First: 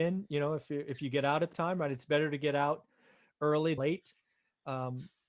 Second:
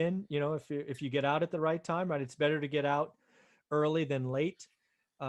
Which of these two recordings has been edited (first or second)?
first